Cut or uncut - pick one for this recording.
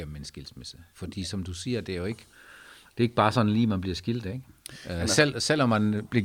uncut